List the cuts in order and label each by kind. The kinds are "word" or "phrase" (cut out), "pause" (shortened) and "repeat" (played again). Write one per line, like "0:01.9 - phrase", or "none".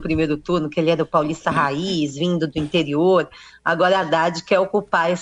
none